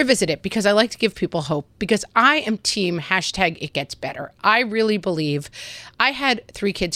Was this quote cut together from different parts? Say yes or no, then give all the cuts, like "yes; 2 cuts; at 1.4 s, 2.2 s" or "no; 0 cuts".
no; 0 cuts